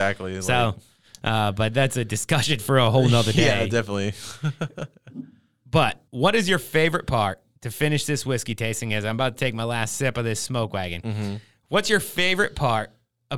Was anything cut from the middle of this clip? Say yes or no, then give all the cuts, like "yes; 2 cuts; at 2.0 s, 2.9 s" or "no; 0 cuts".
yes; 2 cuts; at 6.1 s, 7.6 s